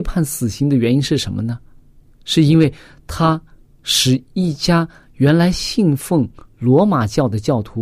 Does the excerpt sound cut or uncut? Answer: uncut